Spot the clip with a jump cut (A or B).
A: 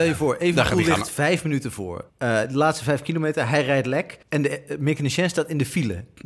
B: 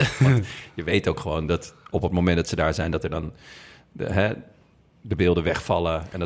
A